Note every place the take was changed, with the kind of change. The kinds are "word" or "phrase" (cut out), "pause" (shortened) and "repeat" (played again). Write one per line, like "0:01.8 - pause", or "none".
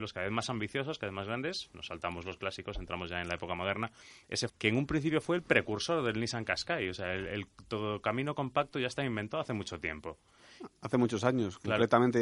0:04.5 - word